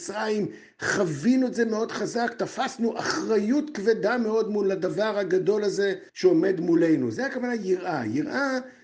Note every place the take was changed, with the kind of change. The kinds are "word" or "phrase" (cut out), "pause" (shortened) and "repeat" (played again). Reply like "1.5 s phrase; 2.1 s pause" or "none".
6.1 s pause

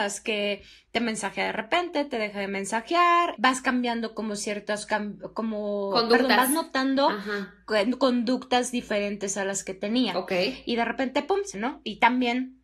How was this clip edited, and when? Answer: 3.4 s word; 11.5 s word

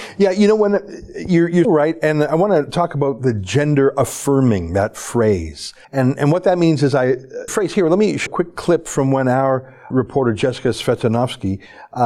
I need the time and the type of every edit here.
1.6 s word; 5.8 s pause; 7.5 s phrase; 8.3 s word; 9.9 s word

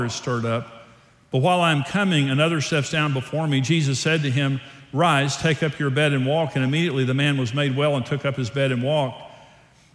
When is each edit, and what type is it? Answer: none

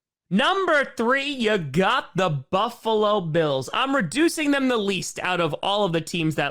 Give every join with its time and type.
none

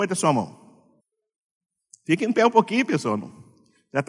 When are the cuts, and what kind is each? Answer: 1.0 s pause

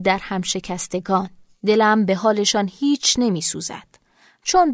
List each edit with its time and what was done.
none

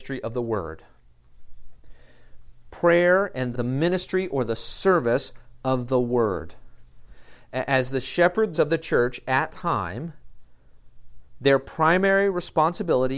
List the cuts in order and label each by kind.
3.5 s word; 8.5 s word; 9.5 s word

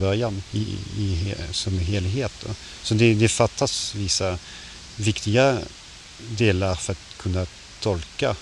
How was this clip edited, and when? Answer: none

